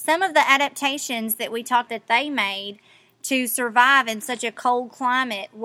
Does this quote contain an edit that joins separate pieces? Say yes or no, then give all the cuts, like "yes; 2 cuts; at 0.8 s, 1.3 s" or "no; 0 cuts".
yes; 1 cut; at 1.9 s